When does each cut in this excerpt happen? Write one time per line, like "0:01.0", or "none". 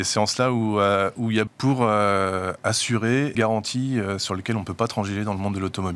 0:01.5
0:03.3